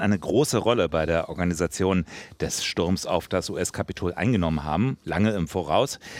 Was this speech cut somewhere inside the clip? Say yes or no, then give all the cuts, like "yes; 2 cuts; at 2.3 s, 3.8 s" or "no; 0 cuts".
no; 0 cuts